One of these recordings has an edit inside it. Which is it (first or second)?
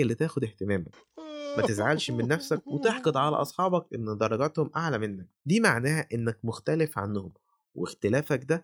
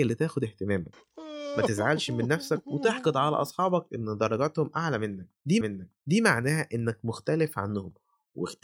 second